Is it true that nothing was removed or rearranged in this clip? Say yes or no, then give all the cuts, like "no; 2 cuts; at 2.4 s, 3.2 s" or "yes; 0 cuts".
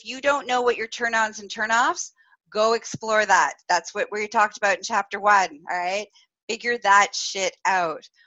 yes; 0 cuts